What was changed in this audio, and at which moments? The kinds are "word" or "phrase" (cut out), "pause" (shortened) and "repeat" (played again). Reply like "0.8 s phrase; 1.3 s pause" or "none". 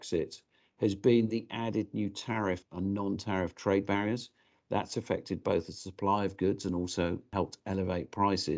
none